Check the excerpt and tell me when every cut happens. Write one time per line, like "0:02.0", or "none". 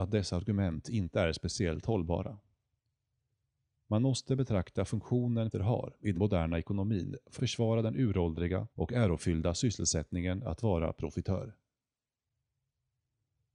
0:05.5
0:06.1
0:07.4
0:08.7